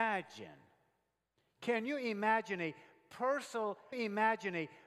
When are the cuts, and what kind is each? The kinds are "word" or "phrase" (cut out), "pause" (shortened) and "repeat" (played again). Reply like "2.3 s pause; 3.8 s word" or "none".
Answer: 3.9 s repeat